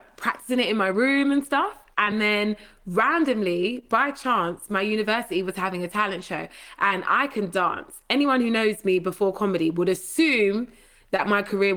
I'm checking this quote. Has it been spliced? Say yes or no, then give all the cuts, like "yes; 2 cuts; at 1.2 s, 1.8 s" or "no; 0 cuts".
no; 0 cuts